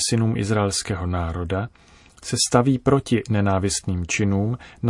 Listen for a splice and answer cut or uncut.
uncut